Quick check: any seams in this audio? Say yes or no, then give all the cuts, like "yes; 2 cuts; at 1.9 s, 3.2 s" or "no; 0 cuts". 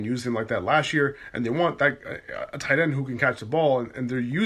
no; 0 cuts